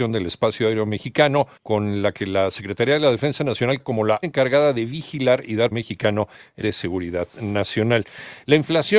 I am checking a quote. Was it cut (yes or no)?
yes